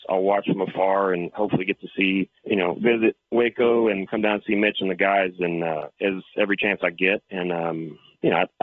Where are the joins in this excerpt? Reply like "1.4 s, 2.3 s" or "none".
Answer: 2.4 s